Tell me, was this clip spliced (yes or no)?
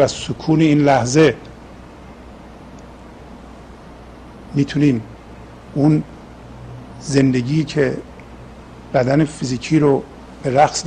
no